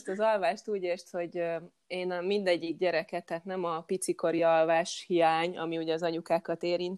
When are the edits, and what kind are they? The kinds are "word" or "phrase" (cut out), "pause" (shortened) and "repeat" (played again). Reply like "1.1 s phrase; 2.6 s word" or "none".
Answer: none